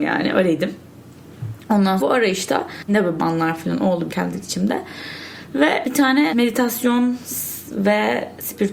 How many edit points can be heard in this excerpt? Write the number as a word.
seven